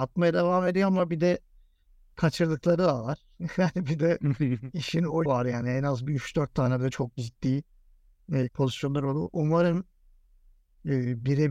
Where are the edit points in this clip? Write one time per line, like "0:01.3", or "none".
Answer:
0:05.3
0:08.5